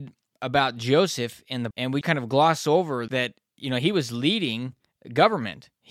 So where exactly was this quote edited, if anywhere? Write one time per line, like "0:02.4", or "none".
0:01.7
0:02.0
0:03.1